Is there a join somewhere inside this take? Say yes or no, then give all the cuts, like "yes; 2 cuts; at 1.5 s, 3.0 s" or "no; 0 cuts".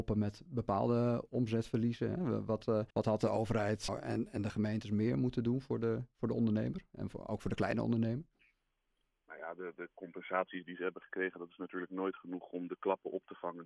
yes; 2 cuts; at 2.9 s, 3.9 s